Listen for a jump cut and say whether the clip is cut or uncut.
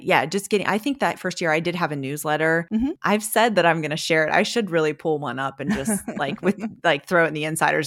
uncut